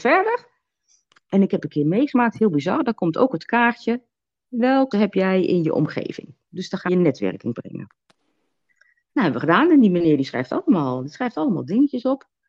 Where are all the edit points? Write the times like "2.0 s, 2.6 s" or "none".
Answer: 4.9 s, 6.9 s, 7.5 s